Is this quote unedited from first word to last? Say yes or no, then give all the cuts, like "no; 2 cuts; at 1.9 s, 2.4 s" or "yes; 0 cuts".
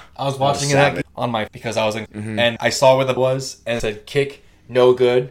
no; 6 cuts; at 1.0 s, 1.5 s, 2.1 s, 2.6 s, 3.2 s, 3.8 s